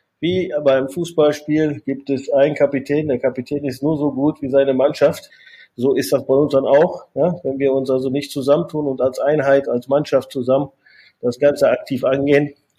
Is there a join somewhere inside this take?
no; 0 cuts

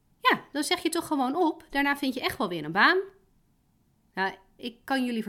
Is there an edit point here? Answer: no; 0 cuts

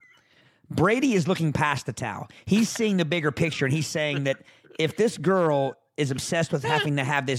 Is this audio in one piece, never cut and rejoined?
yes; 0 cuts

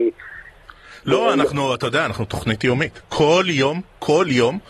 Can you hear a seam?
no; 0 cuts

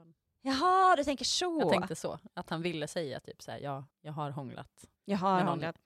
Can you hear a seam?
yes; 2 cuts; at 3.9 s, 5.0 s

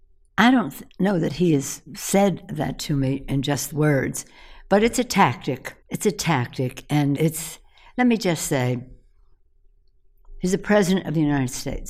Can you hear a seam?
yes; 3 cuts; at 3.7 s, 5.8 s, 7.1 s

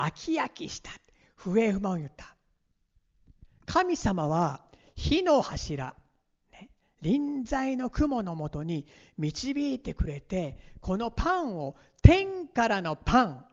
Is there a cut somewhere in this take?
no; 0 cuts

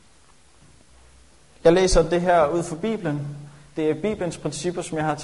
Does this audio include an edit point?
no; 0 cuts

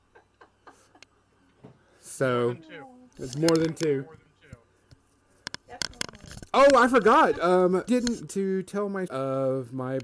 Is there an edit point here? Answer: yes; 3 cuts; at 7.9 s, 8.3 s, 9.1 s

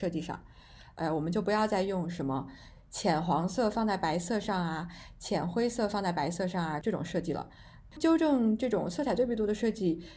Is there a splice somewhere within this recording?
no; 0 cuts

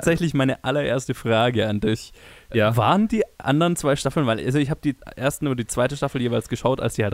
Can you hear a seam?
no; 0 cuts

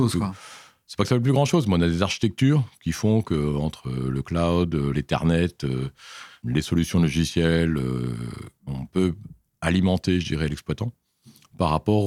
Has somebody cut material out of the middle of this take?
no; 0 cuts

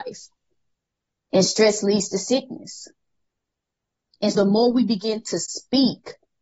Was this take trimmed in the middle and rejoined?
yes; 1 cut; at 4.3 s

